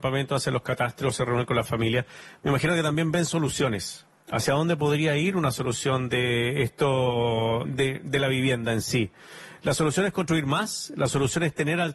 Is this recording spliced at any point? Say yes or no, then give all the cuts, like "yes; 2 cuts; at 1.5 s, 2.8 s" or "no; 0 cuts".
yes; 1 cut; at 7.6 s